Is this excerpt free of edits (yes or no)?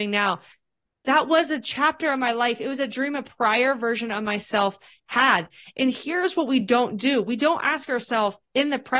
yes